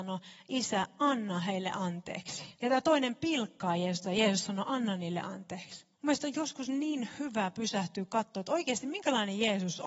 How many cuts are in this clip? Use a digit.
2